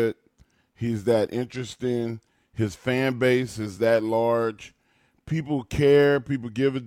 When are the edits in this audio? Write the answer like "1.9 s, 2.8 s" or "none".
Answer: none